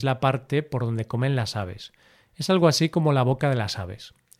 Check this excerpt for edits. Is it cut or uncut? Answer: uncut